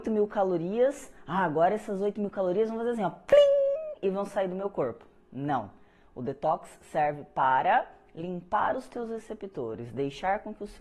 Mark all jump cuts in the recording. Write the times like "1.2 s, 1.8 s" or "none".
none